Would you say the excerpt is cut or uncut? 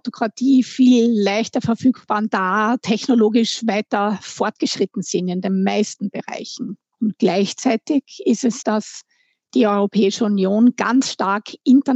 cut